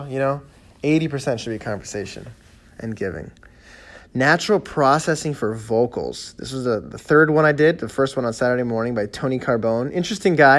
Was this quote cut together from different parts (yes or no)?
no